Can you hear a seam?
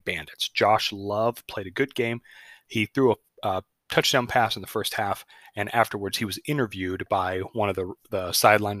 no; 0 cuts

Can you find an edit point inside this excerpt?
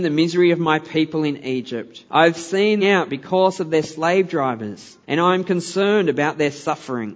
yes; 3 cuts; at 2.1 s, 2.8 s, 5.0 s

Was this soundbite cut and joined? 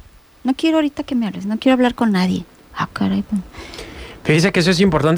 no; 0 cuts

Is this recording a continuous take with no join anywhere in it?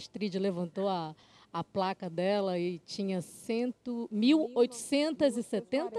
yes; 0 cuts

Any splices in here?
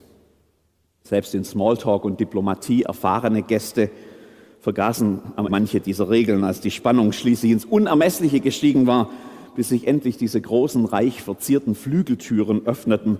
yes; 1 cut; at 5.5 s

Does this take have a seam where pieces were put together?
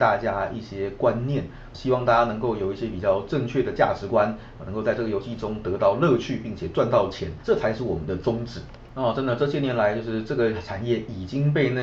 yes; 2 cuts; at 1.7 s, 7.4 s

